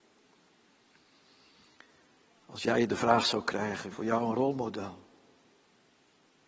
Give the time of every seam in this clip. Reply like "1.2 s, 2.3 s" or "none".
3.9 s